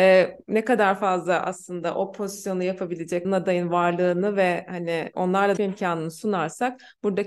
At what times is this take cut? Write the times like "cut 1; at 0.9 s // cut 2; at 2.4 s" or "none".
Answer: cut 1; at 3.2 s // cut 2; at 5.1 s // cut 3; at 5.6 s